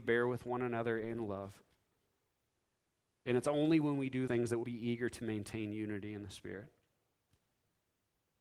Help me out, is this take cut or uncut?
cut